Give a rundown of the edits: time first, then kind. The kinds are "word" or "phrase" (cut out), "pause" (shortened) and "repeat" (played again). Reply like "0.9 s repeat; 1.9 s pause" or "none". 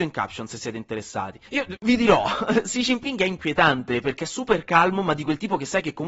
1.5 s pause

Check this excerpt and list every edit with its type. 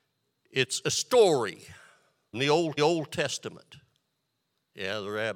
2.3 s word; 2.8 s repeat

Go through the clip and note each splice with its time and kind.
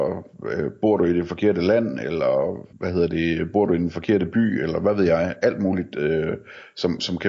2.7 s pause

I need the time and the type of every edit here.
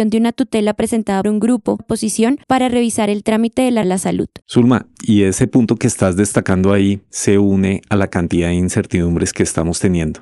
1.2 s word; 1.8 s phrase; 2.4 s pause; 3.8 s word; 4.4 s pause

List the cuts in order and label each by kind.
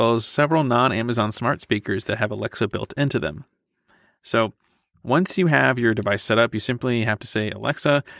none

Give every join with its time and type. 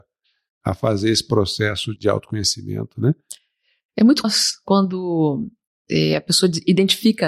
2.0 s word; 4.2 s word

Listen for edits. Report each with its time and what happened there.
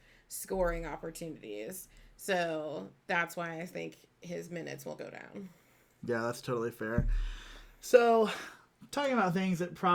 none

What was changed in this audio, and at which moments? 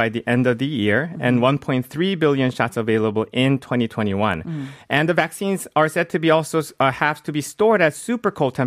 none

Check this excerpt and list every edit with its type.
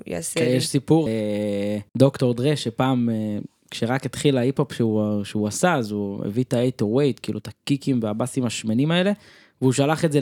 1.1 s word; 1.9 s pause

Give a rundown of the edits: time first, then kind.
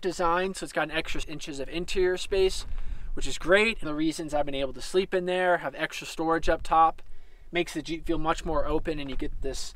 1.2 s word; 3.8 s word

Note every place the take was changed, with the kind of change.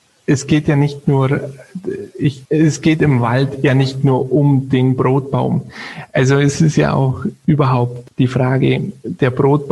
none

